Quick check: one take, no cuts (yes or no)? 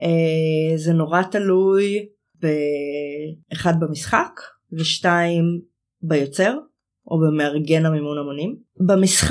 yes